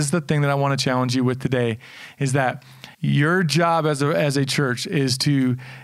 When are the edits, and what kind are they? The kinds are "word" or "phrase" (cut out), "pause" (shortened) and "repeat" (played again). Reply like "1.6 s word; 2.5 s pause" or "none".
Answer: 2.9 s pause